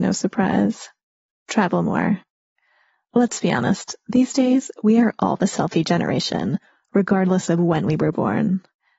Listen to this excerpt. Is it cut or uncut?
uncut